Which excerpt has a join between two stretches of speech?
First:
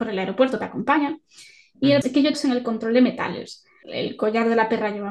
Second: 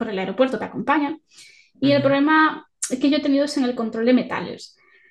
first; 3 cuts; at 2.0 s, 2.3 s, 3.8 s

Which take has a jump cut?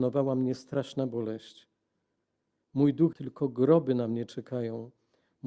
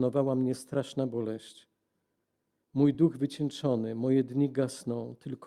first; 1 cut; at 3.1 s

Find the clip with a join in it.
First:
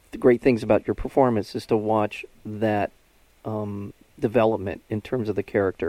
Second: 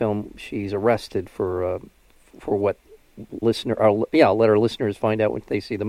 second; 1 cut; at 3.4 s

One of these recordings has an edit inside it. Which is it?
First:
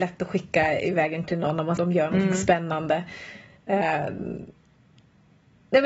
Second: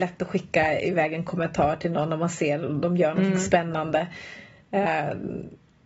first; 2 cuts; at 1.2 s, 1.8 s

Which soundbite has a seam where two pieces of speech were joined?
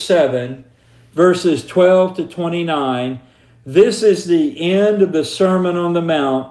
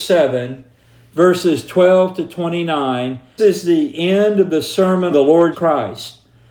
second; 3 cuts; at 3.4 s, 5.1 s, 5.5 s

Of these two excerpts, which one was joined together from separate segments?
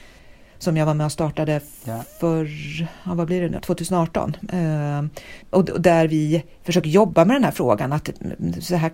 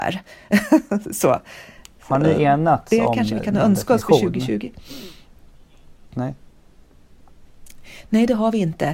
first; 3 cuts; at 3.6 s, 5.4 s, 6.5 s

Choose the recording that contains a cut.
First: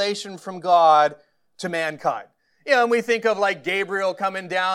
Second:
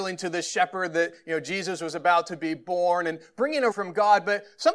second; 1 cut; at 3.7 s

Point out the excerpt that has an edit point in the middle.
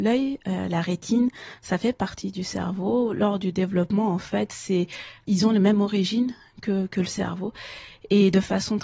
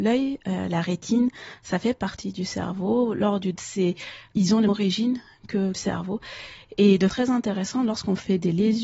second; 4 cuts; at 3.6 s, 4.7 s, 5.7 s, 7.1 s

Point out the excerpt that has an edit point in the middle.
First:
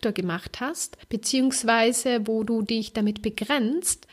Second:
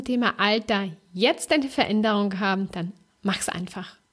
first; 1 cut; at 1.0 s

